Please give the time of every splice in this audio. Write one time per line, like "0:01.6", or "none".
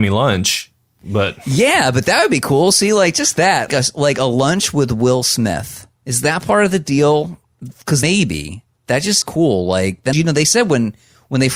0:03.7
0:06.0
0:08.0
0:09.2
0:10.1